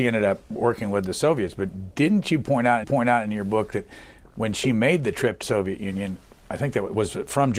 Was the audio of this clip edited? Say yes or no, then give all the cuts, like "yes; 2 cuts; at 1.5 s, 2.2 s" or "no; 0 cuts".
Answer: yes; 3 cuts; at 2.8 s, 5.4 s, 6.4 s